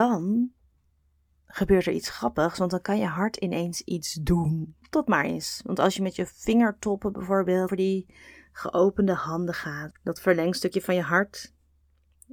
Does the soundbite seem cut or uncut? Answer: cut